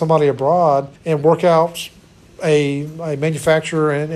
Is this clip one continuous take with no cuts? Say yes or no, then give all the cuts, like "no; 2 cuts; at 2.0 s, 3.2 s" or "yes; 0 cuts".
no; 1 cut; at 1.0 s